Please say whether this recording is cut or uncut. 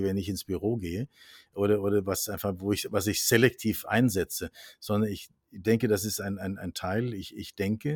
uncut